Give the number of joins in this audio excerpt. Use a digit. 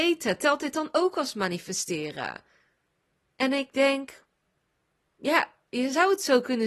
0